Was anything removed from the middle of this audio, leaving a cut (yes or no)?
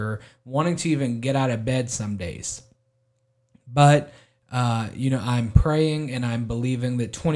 no